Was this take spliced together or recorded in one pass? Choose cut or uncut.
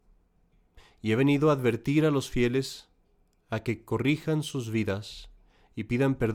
uncut